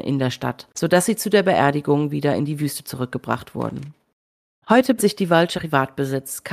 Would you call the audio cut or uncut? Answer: cut